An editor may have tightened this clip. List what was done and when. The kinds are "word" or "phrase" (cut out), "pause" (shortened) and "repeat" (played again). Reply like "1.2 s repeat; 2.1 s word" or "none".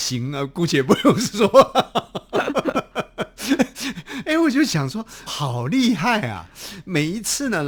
5.3 s word